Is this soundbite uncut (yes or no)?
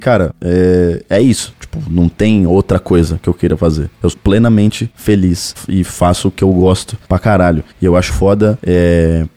no